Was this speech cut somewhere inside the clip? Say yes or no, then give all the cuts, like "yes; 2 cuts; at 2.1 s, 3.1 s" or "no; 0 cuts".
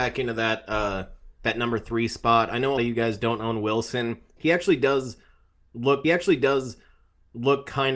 yes; 2 cuts; at 2.8 s, 6.0 s